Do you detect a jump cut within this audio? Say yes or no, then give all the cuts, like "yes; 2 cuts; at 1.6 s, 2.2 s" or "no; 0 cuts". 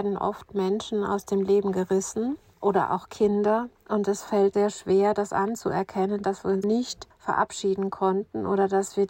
yes; 4 cuts; at 2.5 s, 4.5 s, 6.6 s, 7.1 s